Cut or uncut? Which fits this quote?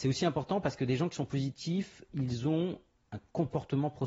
uncut